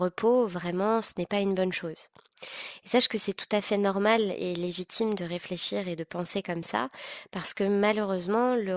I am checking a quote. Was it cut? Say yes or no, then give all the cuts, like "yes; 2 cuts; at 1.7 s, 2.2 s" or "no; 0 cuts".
no; 0 cuts